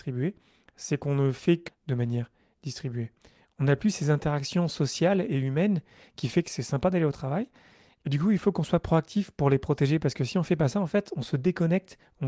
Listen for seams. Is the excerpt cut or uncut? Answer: cut